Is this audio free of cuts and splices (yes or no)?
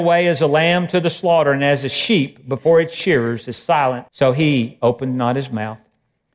no